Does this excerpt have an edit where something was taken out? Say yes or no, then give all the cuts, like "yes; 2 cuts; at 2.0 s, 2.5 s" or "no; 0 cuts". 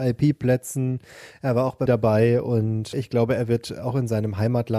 yes; 1 cut; at 1.9 s